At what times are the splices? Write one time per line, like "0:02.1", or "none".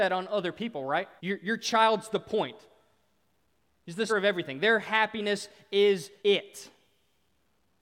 0:01.2
0:04.1
0:06.2